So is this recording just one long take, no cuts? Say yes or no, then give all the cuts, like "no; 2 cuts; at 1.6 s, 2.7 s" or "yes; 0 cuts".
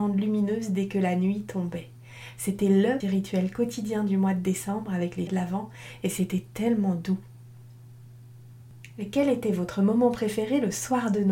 no; 2 cuts; at 3.0 s, 5.3 s